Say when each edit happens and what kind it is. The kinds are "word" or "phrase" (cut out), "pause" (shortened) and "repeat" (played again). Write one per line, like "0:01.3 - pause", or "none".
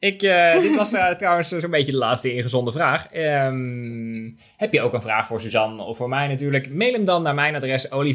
none